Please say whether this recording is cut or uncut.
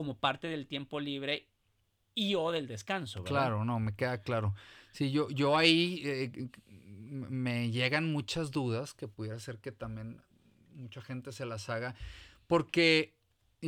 uncut